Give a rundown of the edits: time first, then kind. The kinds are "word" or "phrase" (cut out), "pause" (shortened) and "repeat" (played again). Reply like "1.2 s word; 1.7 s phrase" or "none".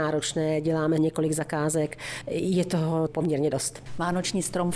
1.0 s word; 3.1 s word